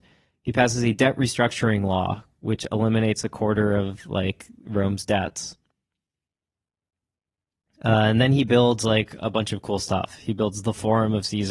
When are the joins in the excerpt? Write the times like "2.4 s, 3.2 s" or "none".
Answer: none